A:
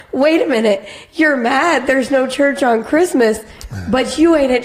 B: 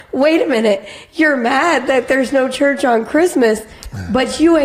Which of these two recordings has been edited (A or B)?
A